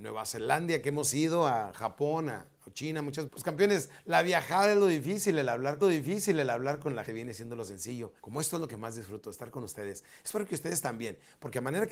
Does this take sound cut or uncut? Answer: cut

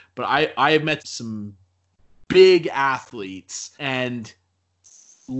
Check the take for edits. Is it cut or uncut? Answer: cut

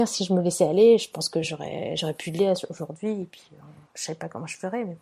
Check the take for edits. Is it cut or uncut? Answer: uncut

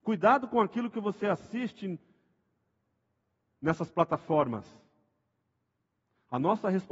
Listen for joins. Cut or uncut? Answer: uncut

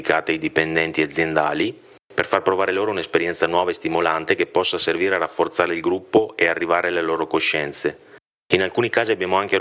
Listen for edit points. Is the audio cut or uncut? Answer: uncut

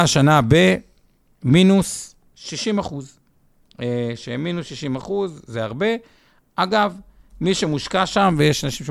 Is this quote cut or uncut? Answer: uncut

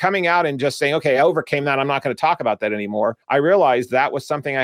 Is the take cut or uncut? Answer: uncut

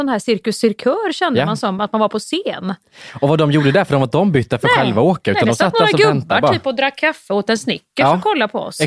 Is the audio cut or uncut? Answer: uncut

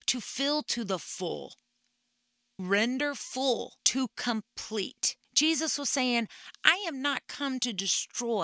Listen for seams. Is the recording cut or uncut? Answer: cut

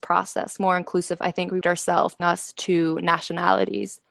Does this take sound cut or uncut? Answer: cut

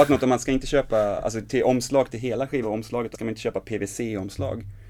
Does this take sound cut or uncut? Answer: cut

